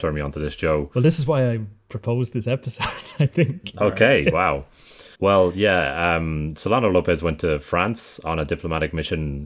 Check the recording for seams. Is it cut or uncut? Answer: cut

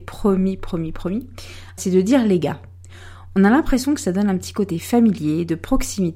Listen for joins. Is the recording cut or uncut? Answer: cut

